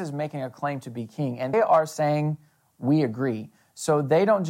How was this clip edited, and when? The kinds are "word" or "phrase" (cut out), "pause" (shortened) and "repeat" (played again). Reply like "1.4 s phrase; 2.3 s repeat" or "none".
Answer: 1.5 s word